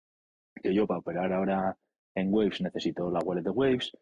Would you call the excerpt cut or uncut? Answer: uncut